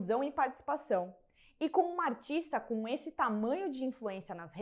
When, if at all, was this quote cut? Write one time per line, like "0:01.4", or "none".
none